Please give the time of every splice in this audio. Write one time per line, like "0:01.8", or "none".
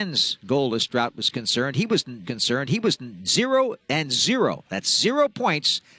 0:02.2

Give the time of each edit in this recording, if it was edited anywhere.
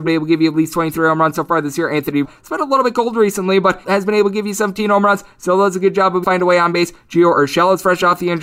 0:02.2
0:03.8
0:06.2

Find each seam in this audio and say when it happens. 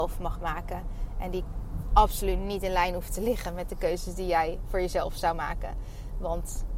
none

